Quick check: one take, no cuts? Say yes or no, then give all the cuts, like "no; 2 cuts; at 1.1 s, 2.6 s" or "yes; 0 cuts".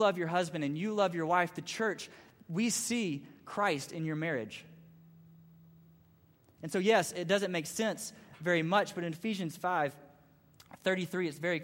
yes; 0 cuts